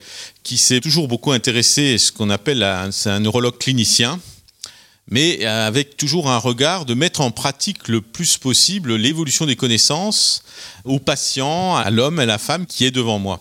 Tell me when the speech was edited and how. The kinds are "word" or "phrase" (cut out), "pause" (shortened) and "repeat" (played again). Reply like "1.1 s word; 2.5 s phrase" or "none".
none

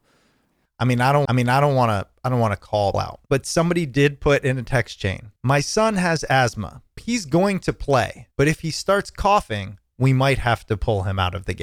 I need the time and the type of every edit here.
1.3 s repeat; 2.9 s word; 3.3 s pause; 5.4 s pause; 7.0 s word; 8.3 s pause

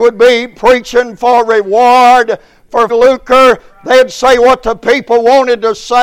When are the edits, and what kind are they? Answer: 2.9 s word

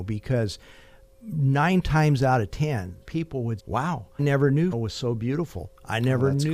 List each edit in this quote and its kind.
3.0 s word; 3.6 s word; 4.2 s word; 4.7 s word

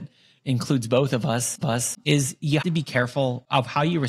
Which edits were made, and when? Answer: 1.6 s repeat; 2.6 s word

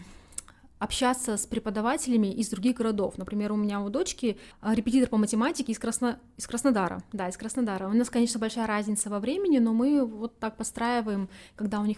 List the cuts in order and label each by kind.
4.5 s pause

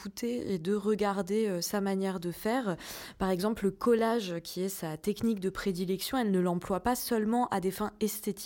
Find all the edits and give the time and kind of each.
none

